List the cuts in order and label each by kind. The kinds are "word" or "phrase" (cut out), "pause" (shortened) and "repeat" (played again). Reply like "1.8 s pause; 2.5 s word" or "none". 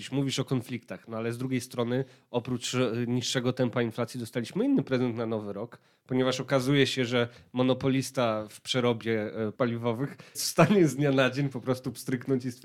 9.5 s word; 10.3 s word